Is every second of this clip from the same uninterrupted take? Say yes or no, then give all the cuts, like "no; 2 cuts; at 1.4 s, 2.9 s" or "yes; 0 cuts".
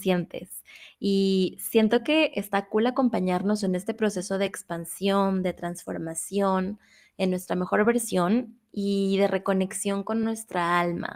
yes; 0 cuts